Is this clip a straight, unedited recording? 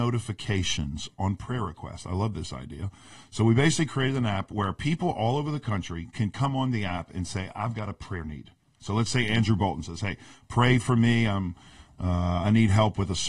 yes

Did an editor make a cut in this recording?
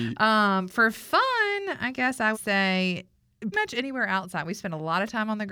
yes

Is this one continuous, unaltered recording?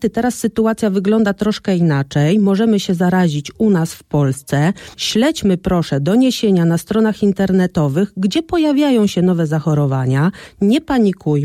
no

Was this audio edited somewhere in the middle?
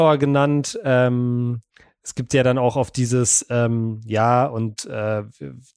no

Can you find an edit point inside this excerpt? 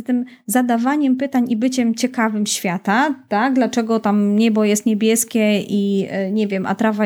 no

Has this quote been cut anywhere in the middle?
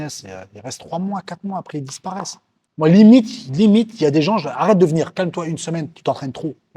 no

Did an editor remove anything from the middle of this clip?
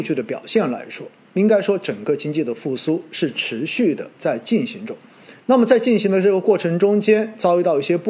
yes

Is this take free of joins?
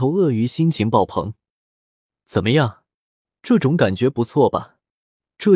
yes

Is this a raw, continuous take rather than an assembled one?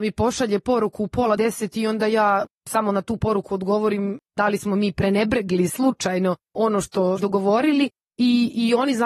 no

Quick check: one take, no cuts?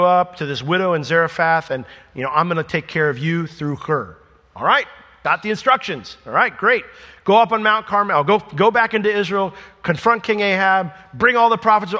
yes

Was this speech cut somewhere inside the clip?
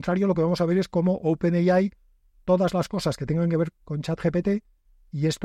yes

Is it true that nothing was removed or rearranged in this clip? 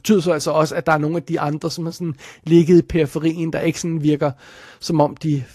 yes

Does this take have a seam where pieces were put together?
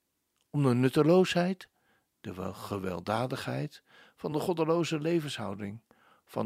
no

